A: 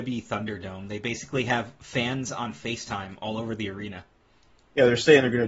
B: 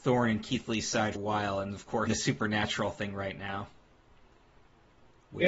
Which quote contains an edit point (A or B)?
B